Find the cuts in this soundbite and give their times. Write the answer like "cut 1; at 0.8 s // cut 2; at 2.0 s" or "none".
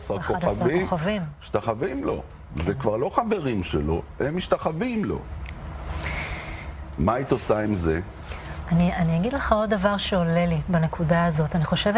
none